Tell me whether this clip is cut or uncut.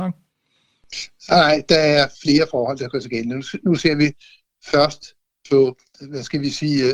cut